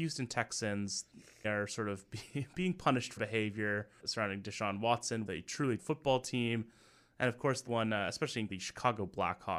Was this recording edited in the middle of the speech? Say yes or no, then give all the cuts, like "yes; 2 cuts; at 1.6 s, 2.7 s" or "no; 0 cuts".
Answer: yes; 7 cuts; at 1.4 s, 3.2 s, 4.0 s, 5.3 s, 5.8 s, 7.7 s, 8.5 s